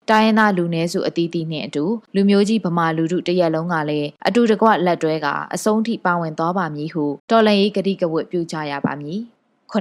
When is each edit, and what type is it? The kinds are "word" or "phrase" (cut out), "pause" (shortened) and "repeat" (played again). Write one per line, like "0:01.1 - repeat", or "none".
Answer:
0:02.1 - pause
0:04.2 - pause
0:07.2 - pause